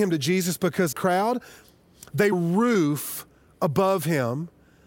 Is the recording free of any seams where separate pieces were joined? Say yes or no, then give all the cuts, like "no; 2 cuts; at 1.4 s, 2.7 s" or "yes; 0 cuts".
no; 2 cuts; at 0.9 s, 2.3 s